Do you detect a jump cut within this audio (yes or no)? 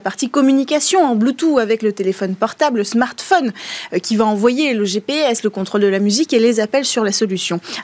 no